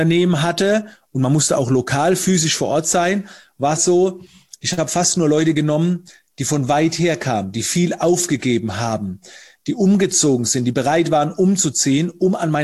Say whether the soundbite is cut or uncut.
cut